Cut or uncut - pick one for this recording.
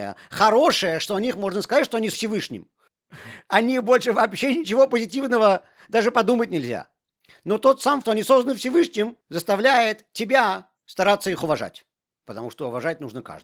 cut